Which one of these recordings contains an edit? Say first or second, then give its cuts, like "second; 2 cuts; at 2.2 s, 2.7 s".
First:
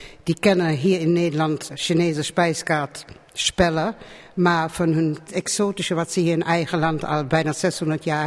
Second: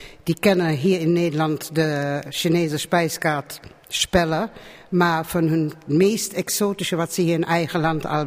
first; 2 cuts; at 1.7 s, 5.3 s